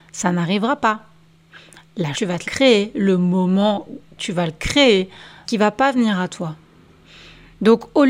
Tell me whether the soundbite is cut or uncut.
cut